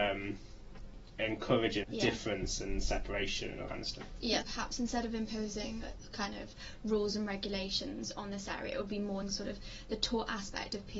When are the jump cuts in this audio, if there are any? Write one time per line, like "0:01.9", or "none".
0:01.8
0:03.7
0:04.4
0:09.2